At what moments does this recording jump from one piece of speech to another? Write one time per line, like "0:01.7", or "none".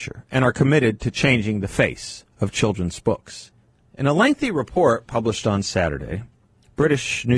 0:03.8